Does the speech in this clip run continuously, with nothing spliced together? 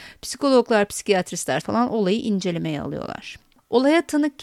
no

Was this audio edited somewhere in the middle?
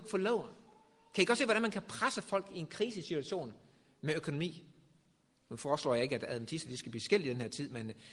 no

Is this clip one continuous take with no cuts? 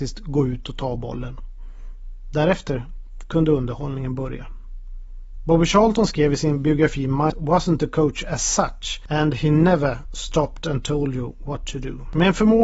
no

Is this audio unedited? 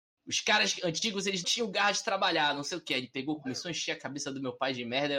no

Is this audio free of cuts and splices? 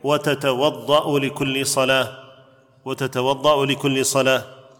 yes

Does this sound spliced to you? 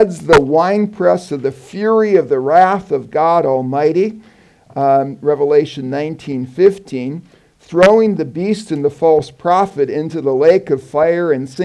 no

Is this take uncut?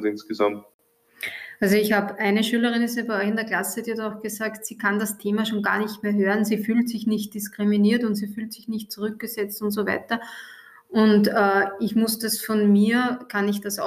yes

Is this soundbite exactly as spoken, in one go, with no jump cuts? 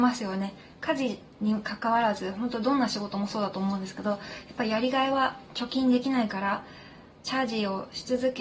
yes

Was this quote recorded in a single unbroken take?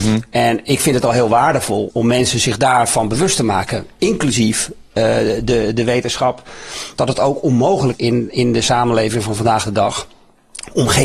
no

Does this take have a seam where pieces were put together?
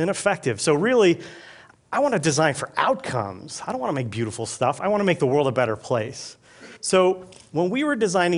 yes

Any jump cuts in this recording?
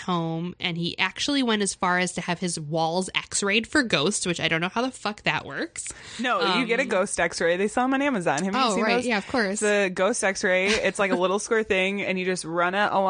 no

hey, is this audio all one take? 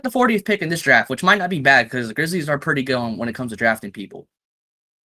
yes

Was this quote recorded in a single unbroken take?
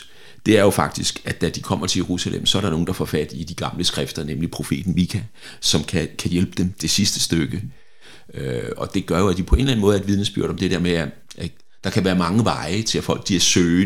yes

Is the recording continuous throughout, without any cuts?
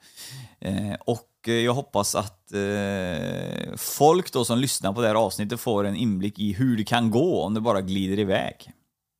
yes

